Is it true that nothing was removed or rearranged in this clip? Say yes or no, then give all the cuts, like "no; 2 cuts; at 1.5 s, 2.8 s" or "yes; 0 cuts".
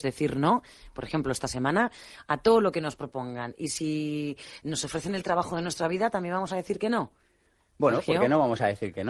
yes; 0 cuts